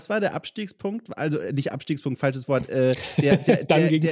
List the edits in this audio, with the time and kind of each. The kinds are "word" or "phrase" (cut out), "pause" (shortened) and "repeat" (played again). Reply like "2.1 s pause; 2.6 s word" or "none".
none